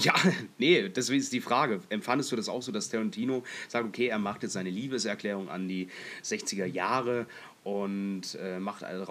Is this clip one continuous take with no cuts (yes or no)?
yes